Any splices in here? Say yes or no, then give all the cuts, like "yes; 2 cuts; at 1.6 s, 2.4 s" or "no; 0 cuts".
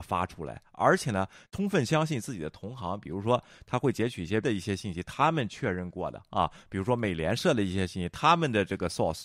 yes; 2 cuts; at 1.5 s, 4.4 s